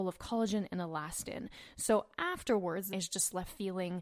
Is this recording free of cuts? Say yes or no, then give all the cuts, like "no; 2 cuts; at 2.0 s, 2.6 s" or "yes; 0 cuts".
no; 1 cut; at 2.9 s